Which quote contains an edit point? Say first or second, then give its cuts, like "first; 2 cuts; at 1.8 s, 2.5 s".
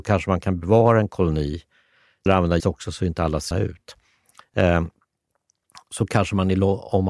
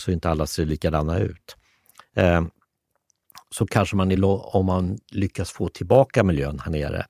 first; 3 cuts; at 2.3 s, 2.6 s, 3.5 s